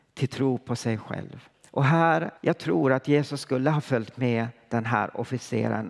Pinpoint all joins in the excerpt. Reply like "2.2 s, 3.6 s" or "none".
1.5 s, 2.4 s